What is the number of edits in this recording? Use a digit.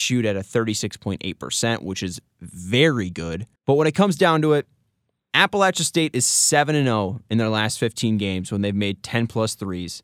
1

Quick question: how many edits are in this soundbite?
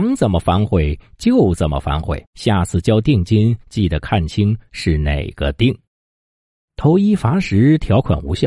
3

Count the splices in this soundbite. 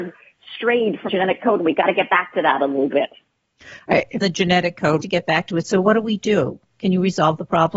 3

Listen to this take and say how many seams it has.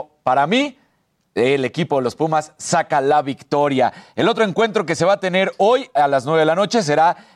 0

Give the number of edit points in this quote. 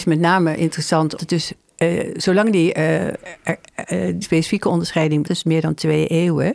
3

